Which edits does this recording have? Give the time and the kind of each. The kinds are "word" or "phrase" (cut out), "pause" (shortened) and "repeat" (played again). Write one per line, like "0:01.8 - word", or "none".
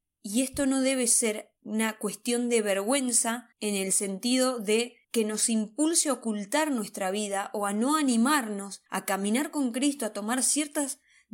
0:01.6 - pause
0:03.5 - pause
0:05.0 - pause
0:08.9 - pause